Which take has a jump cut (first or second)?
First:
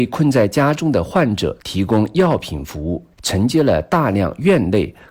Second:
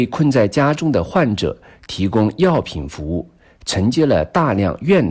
first